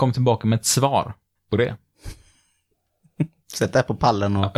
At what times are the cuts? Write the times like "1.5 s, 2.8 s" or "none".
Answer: none